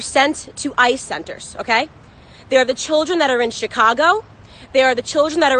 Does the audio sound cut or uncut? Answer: cut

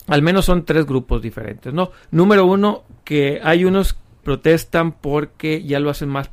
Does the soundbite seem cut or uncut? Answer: cut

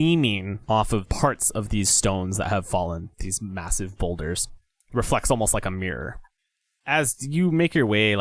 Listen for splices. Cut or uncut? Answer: uncut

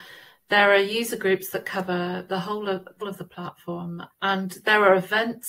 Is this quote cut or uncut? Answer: cut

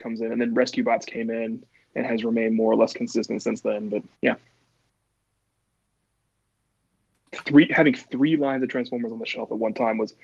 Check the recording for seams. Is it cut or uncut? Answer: cut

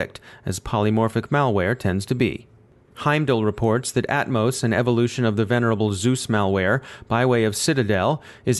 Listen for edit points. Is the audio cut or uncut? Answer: uncut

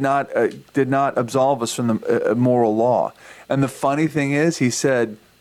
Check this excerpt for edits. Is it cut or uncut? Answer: uncut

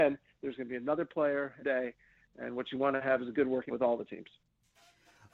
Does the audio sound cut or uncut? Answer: cut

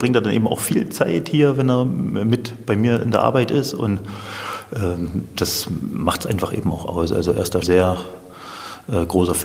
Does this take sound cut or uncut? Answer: cut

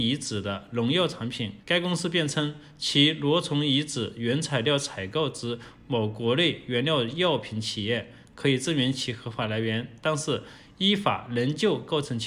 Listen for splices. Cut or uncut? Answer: cut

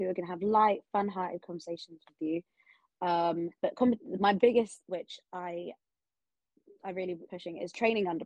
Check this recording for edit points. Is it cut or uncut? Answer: cut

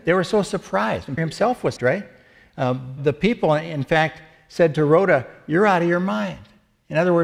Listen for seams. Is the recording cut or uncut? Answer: cut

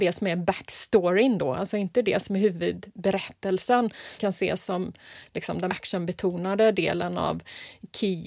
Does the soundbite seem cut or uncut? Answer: cut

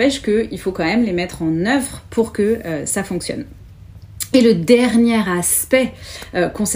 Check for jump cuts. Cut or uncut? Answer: uncut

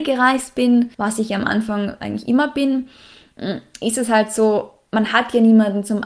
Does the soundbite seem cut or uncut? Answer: cut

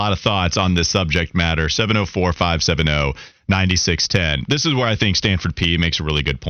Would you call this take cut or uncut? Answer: uncut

